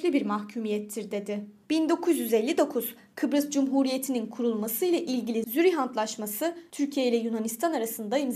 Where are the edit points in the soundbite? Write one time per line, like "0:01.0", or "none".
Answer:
0:01.6